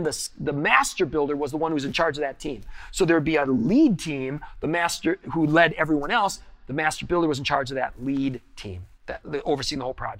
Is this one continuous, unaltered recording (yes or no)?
no